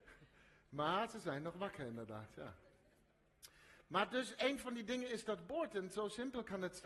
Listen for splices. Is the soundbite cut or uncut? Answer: uncut